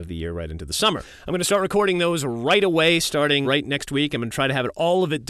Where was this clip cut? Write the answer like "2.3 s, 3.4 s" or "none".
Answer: 3.4 s